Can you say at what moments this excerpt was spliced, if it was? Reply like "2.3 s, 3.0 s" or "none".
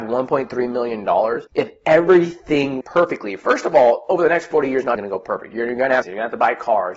1.5 s, 2.8 s, 4.9 s, 6.0 s

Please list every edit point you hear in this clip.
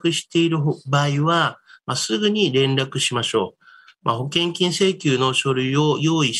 none

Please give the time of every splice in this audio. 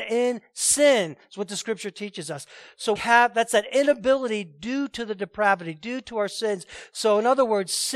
3.0 s

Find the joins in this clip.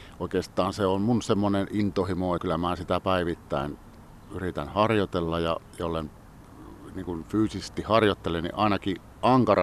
2.4 s

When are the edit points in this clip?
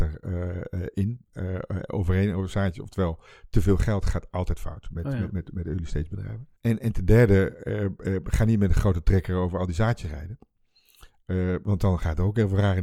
6.6 s

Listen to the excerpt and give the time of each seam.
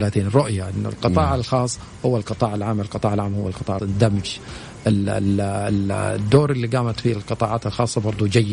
3.8 s

